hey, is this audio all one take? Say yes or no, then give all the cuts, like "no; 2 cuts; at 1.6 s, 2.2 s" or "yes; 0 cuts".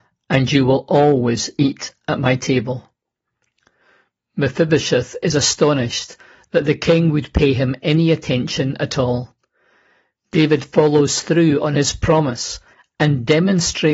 yes; 0 cuts